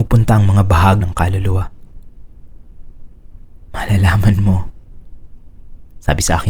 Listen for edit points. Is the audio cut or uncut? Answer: cut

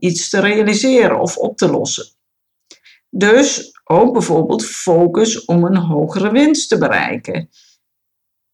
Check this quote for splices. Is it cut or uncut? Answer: uncut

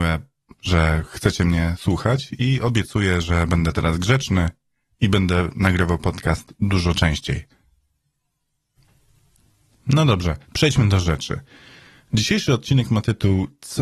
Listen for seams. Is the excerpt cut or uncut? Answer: cut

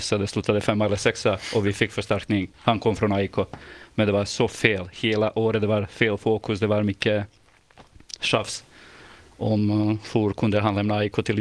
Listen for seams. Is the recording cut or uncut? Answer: cut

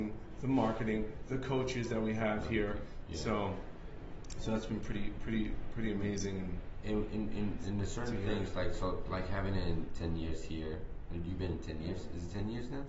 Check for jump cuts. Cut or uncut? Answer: uncut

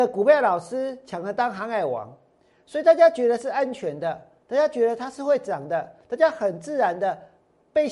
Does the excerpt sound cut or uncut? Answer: uncut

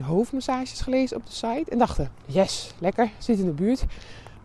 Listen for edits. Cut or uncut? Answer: uncut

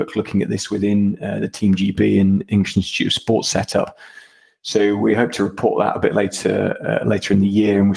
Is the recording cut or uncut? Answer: uncut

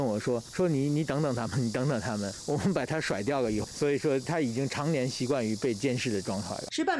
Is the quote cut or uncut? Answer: cut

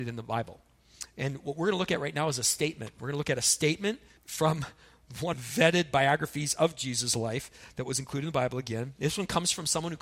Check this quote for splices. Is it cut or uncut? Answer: cut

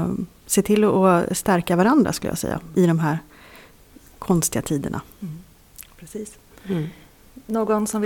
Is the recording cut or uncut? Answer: cut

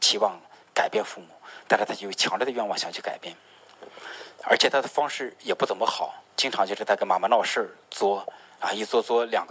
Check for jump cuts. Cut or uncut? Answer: cut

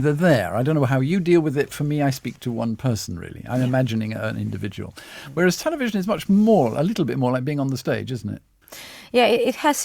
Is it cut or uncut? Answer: uncut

